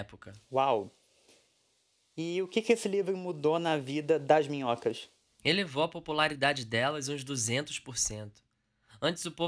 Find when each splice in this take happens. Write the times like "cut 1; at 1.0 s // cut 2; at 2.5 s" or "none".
none